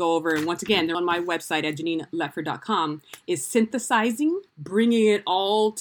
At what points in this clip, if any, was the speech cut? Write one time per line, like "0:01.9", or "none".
0:00.9
0:04.5